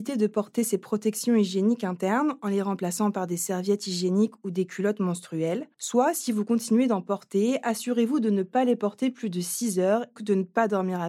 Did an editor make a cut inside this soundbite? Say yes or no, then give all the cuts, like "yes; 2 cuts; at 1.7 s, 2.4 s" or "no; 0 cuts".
yes; 1 cut; at 10.2 s